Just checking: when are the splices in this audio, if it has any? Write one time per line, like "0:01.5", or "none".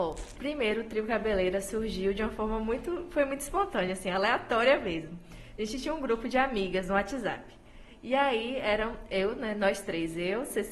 none